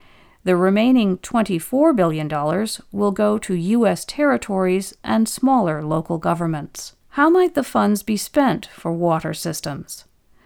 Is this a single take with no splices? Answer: no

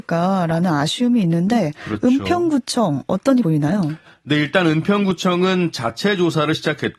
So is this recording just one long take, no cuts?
no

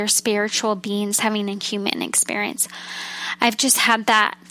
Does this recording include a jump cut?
no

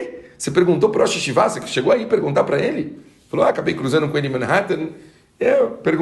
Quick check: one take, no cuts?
yes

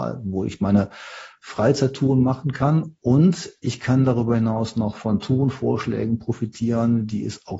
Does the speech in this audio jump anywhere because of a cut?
no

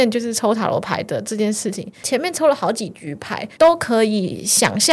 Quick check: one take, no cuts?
no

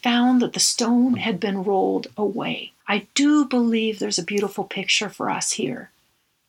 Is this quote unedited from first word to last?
no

